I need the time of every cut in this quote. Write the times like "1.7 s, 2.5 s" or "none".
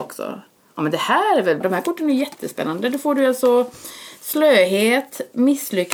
1.6 s